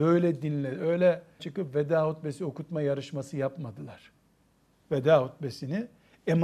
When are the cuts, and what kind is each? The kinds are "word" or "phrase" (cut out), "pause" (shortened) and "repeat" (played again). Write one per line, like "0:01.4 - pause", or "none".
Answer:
0:01.4 - word